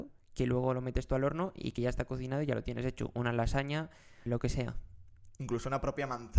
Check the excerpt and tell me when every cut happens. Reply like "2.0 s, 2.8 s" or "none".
4.3 s